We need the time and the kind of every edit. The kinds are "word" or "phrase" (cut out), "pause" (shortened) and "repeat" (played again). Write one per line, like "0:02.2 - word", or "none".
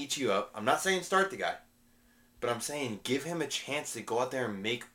none